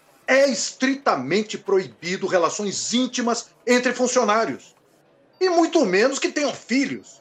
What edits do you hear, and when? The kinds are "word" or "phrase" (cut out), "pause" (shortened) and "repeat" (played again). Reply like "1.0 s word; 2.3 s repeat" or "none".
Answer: none